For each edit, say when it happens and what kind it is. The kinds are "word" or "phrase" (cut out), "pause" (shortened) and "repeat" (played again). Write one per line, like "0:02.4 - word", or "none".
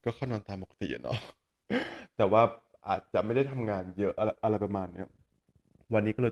none